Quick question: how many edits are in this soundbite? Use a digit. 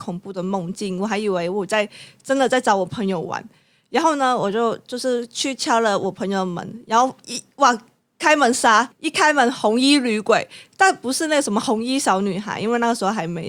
1